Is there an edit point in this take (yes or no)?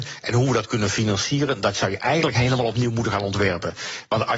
no